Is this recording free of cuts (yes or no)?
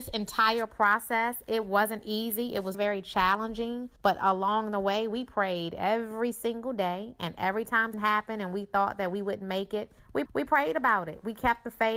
no